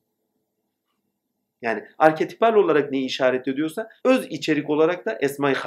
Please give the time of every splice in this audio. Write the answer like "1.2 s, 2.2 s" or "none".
4.0 s